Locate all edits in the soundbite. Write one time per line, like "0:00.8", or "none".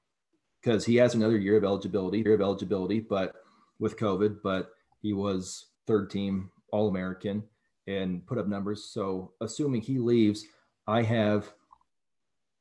0:02.3
0:05.7